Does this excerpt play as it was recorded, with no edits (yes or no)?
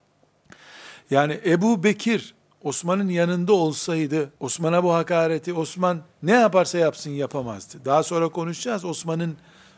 no